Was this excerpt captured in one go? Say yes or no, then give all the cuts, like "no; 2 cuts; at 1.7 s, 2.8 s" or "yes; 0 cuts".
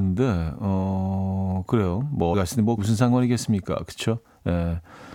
no; 2 cuts; at 2.3 s, 2.8 s